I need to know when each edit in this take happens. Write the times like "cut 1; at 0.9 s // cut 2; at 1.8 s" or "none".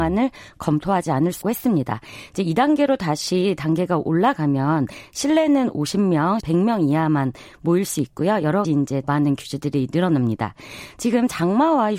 cut 1; at 1.4 s // cut 2; at 6.4 s // cut 3; at 8.6 s // cut 4; at 9.0 s